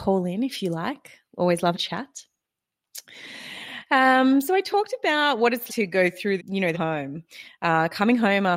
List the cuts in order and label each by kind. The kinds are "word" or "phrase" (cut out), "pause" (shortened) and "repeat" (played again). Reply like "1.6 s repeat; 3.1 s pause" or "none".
1.7 s word; 5.7 s word; 6.4 s word; 6.7 s phrase